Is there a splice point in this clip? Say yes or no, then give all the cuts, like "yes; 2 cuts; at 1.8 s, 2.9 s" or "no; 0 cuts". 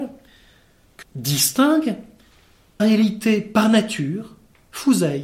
yes; 2 cuts; at 1.0 s, 2.8 s